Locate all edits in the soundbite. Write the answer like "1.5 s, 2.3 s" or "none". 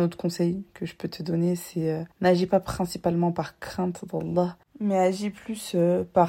2.1 s, 4.6 s